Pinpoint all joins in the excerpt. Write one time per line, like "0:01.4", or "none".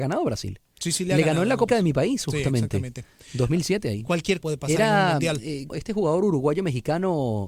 0:01.7
0:04.4
0:05.7